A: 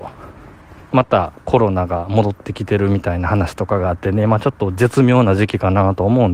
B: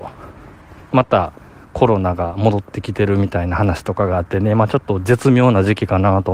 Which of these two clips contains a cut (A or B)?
A